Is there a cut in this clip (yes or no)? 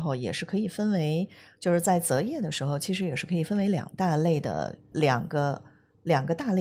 yes